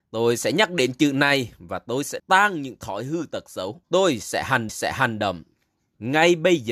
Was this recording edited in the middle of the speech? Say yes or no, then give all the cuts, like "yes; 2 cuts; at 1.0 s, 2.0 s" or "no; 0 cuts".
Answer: yes; 3 cuts; at 2.2 s, 3.8 s, 4.7 s